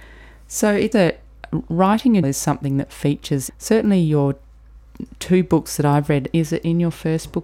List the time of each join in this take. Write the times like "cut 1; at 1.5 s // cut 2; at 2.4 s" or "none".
cut 1; at 0.9 s // cut 2; at 2.2 s // cut 3; at 3.5 s

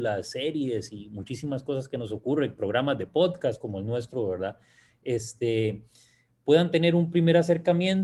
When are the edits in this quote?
none

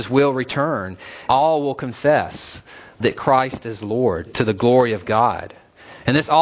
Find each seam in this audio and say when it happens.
cut 1; at 1.3 s // cut 2; at 3.0 s // cut 3; at 4.3 s

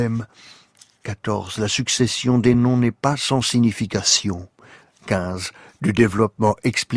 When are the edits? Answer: none

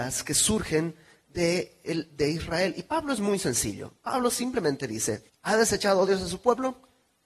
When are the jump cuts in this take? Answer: cut 1; at 5.3 s

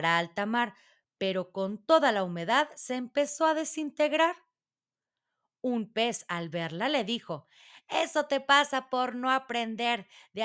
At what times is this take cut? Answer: none

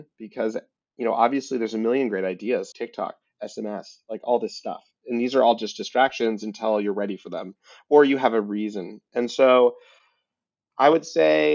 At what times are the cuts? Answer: cut 1; at 2.7 s

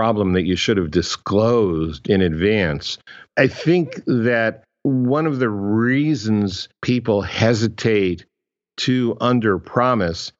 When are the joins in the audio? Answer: cut 1; at 3.3 s // cut 2; at 6.8 s

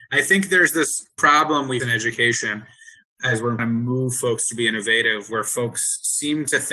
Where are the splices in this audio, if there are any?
cut 1; at 1.8 s // cut 2; at 3.6 s

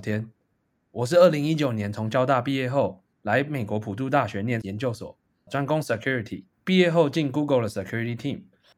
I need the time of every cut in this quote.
cut 1; at 3.1 s // cut 2; at 4.6 s // cut 3; at 5.5 s // cut 4; at 6.5 s

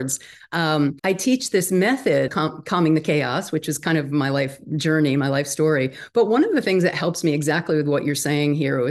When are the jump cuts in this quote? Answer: cut 1; at 1.0 s // cut 2; at 2.3 s

